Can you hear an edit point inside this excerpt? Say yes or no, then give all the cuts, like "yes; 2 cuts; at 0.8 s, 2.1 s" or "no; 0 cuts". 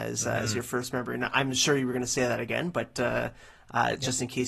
no; 0 cuts